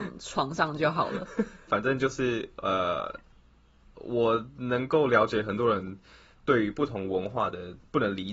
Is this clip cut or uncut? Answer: uncut